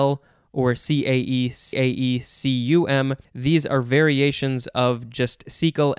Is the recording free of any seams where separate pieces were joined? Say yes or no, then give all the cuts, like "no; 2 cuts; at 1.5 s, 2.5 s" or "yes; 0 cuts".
no; 2 cuts; at 1.7 s, 3.2 s